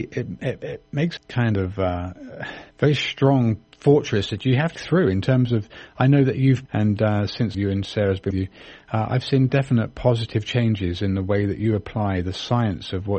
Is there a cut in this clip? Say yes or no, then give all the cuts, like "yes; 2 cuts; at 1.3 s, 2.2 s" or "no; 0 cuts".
yes; 6 cuts; at 1.2 s, 2.7 s, 4.8 s, 6.7 s, 7.5 s, 8.3 s